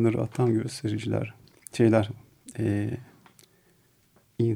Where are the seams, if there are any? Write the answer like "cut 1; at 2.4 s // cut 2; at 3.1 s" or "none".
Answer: none